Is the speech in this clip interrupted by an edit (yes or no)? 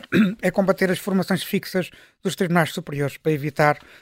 no